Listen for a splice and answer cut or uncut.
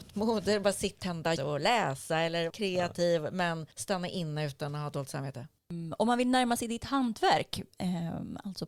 cut